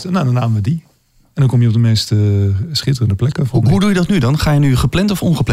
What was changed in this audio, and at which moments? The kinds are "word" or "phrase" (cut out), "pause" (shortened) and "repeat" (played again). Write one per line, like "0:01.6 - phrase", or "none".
none